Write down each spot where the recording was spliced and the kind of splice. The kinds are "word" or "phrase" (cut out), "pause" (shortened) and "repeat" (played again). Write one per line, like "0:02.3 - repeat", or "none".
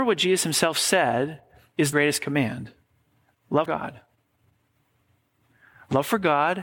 0:01.9 - phrase
0:03.7 - word